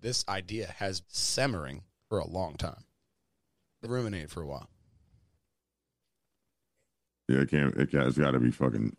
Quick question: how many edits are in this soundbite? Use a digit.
3